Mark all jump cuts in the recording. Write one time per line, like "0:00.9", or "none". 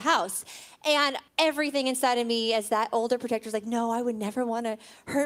0:01.3